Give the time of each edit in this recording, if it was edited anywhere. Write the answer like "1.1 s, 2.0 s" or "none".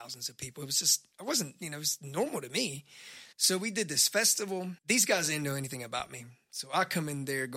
1.1 s, 3.3 s, 4.8 s